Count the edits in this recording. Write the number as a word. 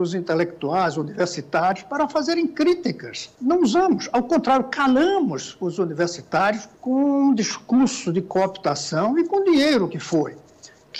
two